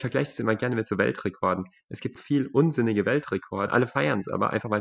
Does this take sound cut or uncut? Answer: cut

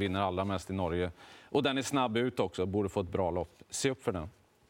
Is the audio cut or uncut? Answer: uncut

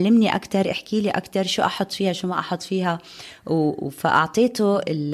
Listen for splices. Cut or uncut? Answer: uncut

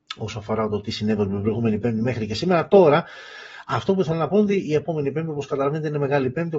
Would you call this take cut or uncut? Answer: uncut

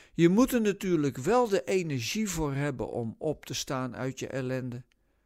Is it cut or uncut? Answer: uncut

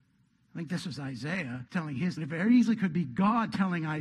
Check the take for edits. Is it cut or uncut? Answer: cut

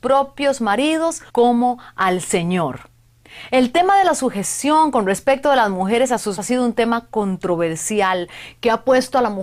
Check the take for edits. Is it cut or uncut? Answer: cut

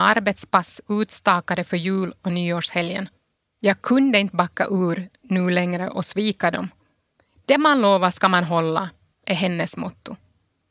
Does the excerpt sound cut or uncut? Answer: uncut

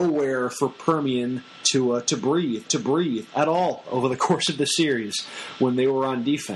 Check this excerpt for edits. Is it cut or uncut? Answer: cut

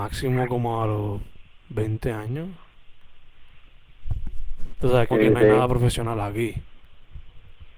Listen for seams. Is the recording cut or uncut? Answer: cut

